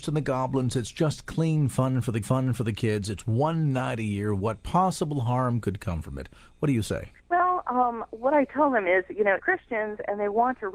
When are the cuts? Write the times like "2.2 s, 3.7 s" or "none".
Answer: 2.2 s, 7.2 s, 9.4 s